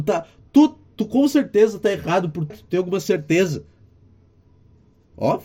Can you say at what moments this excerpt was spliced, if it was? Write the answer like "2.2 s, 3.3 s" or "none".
2.5 s